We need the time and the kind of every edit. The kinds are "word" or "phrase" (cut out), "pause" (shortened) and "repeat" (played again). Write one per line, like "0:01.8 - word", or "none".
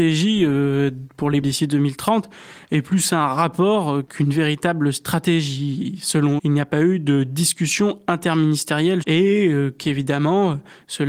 0:01.4 - word
0:06.4 - word
0:09.0 - word